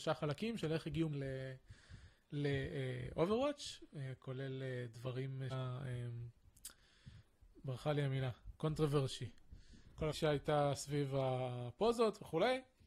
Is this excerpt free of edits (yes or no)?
no